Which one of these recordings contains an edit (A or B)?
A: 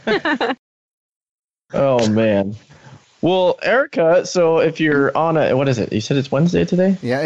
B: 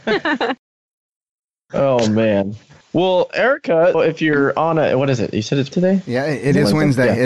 B